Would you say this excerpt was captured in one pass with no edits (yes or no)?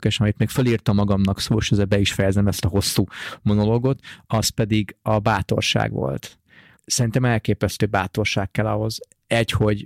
yes